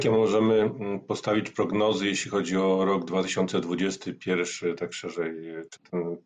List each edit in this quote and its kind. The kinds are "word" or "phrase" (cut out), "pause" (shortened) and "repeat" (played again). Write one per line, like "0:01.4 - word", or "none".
none